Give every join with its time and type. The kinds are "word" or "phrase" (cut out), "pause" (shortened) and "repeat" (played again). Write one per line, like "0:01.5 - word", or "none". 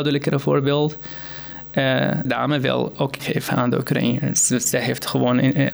0:02.2 - word
0:03.2 - word